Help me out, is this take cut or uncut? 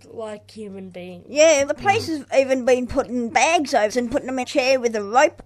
cut